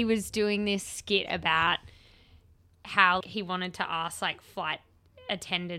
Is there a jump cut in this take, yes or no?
yes